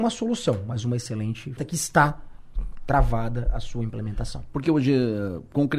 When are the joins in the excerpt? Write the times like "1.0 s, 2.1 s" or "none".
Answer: 1.6 s